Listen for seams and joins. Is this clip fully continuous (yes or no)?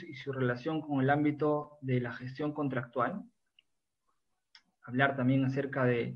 yes